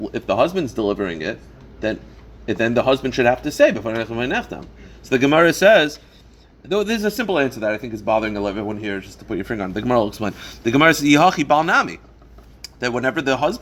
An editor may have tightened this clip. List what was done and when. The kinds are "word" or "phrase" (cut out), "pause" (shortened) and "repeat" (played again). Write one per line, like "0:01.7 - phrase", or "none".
none